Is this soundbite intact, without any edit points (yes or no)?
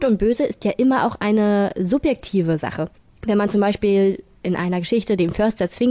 no